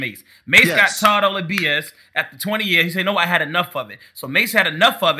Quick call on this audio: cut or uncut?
uncut